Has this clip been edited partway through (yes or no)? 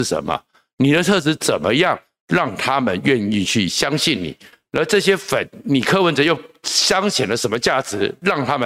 no